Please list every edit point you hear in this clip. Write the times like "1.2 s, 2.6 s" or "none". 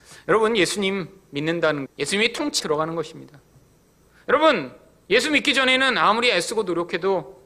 1.9 s, 2.6 s